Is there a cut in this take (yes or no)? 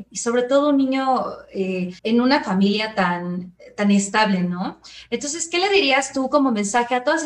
yes